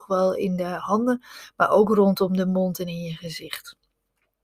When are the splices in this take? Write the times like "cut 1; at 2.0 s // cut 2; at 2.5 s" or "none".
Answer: none